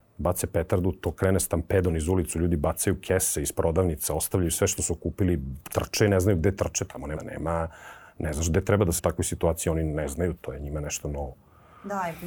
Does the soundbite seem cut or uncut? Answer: cut